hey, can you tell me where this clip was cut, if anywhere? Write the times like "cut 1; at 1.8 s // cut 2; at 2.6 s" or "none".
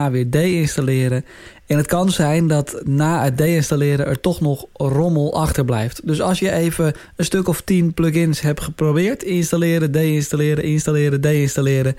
none